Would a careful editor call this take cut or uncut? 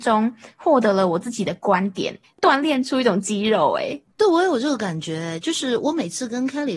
cut